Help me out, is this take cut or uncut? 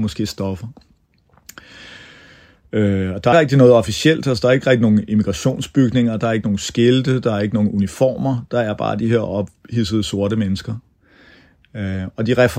cut